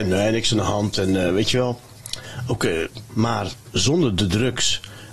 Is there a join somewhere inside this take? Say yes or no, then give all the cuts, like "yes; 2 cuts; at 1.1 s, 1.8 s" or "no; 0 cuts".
yes; 1 cut; at 3.1 s